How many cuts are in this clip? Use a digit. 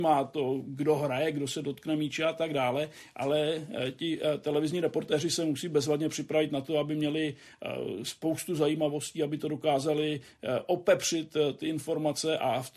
0